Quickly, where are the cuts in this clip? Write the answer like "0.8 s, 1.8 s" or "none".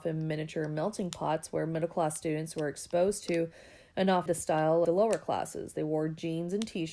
4.3 s, 4.8 s